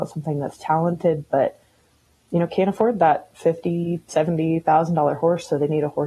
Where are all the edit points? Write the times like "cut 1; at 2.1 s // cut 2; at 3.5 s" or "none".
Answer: none